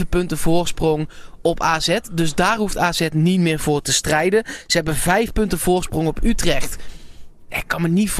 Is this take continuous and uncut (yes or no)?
yes